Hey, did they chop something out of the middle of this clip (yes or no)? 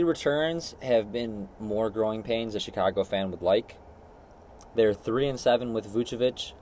yes